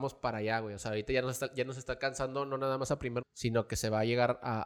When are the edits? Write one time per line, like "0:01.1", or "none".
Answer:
0:03.2